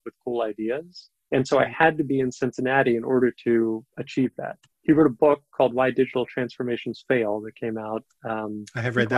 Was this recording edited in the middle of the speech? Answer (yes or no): yes